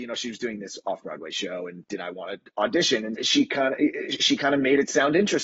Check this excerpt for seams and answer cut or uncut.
cut